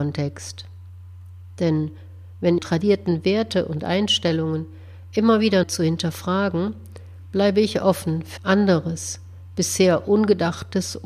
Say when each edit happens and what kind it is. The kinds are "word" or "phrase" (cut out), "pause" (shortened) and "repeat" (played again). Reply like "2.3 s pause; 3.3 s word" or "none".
2.6 s phrase; 5.6 s word; 8.4 s word